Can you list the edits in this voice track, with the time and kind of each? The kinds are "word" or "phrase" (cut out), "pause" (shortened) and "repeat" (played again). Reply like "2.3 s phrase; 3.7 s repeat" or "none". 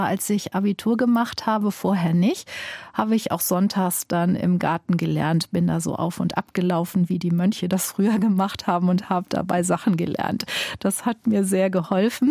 none